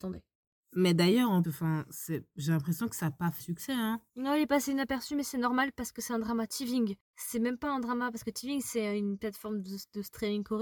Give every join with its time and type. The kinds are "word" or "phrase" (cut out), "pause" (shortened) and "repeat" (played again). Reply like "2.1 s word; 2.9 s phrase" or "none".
1.4 s word; 3.4 s word